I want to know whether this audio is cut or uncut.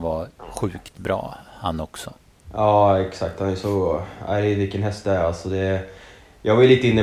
uncut